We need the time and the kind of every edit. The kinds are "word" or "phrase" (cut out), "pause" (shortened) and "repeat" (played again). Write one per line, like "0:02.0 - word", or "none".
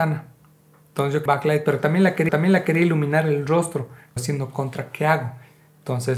0:01.3 - phrase
0:02.3 - repeat
0:04.2 - word